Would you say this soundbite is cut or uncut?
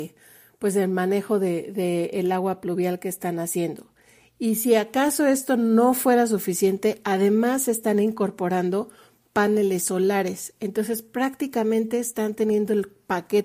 uncut